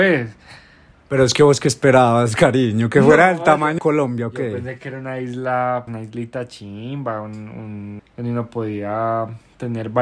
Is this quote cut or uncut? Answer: cut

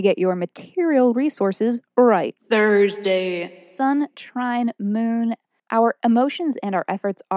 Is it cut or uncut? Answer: uncut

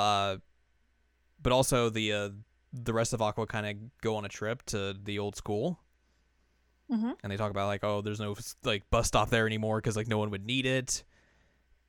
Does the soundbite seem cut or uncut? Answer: uncut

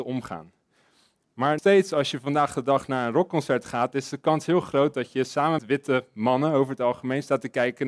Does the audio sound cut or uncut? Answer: cut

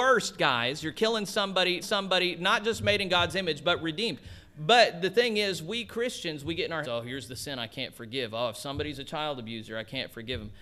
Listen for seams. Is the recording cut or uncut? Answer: cut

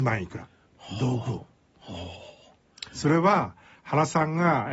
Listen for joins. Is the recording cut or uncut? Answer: uncut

